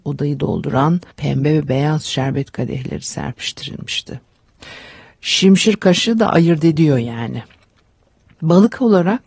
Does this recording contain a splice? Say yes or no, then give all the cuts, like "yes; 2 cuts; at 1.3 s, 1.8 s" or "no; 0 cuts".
yes; 1 cut; at 1.1 s